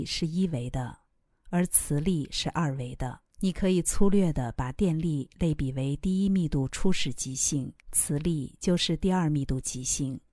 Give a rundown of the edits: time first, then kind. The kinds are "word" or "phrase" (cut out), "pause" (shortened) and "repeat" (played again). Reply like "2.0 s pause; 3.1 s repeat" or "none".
3.3 s pause; 7.8 s pause